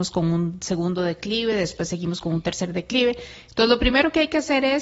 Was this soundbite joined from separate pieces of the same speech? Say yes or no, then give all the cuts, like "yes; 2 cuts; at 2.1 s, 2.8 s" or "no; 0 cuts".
no; 0 cuts